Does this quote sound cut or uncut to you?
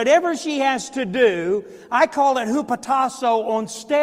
uncut